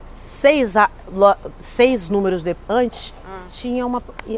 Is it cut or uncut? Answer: uncut